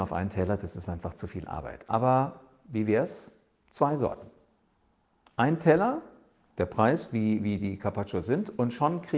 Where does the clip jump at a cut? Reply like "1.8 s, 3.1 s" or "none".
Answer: none